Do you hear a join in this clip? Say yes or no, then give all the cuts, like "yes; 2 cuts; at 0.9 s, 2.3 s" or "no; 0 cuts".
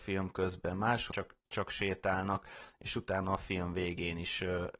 yes; 2 cuts; at 1.1 s, 1.5 s